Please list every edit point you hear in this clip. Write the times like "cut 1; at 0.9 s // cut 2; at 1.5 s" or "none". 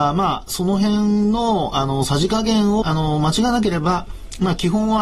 cut 1; at 2.8 s